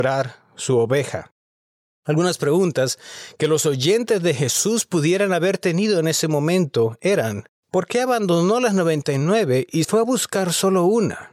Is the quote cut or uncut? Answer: cut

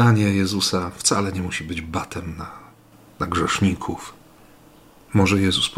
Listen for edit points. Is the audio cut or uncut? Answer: uncut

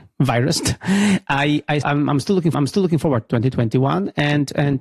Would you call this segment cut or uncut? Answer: cut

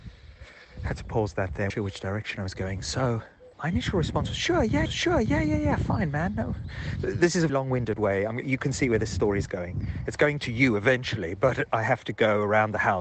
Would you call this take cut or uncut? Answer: cut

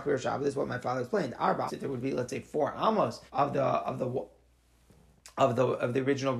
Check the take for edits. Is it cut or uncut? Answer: cut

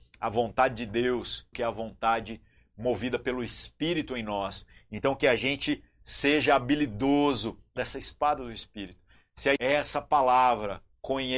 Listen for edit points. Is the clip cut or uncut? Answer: cut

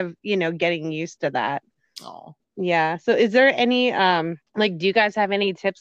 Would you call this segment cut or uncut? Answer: cut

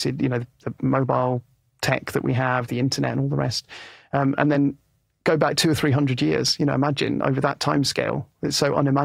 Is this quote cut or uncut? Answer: uncut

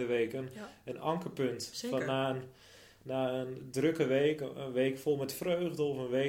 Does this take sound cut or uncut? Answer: uncut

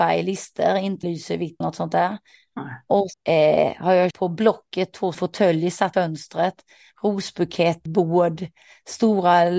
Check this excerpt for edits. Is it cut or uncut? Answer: cut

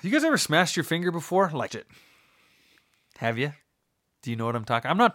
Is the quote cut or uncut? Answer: cut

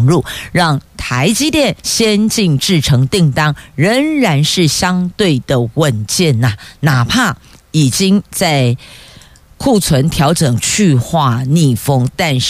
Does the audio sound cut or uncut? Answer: uncut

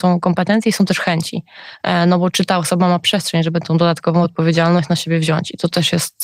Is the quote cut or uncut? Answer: uncut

